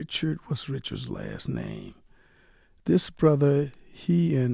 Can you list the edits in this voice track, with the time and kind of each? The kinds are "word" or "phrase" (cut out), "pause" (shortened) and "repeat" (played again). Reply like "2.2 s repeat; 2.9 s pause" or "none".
none